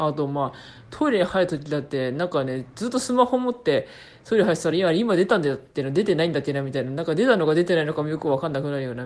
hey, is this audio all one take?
yes; 0 cuts

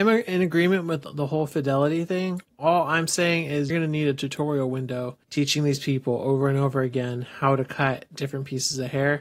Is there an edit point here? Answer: yes; 2 cuts; at 3.7 s, 5.2 s

